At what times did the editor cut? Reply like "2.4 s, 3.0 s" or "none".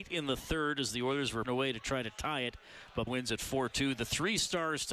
1.4 s, 3.1 s